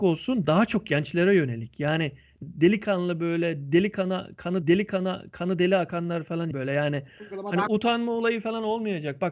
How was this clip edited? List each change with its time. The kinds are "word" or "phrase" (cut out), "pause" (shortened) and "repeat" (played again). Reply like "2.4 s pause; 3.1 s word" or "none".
2.4 s phrase; 4.6 s repeat; 6.5 s word; 7.7 s word